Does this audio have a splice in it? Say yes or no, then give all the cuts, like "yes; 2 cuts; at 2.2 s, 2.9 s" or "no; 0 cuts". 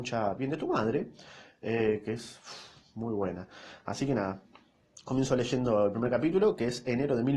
no; 0 cuts